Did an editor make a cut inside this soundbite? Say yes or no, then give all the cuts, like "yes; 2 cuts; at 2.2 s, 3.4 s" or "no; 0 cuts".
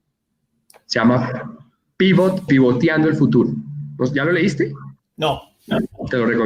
yes; 2 cuts; at 2.5 s, 5.0 s